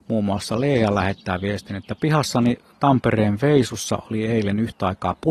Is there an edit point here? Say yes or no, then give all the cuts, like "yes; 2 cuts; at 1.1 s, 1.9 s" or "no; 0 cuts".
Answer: no; 0 cuts